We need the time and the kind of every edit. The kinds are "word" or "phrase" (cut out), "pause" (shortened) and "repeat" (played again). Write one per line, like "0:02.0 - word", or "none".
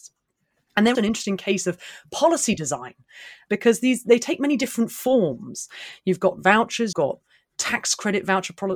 0:00.9 - word
0:03.5 - word
0:06.9 - word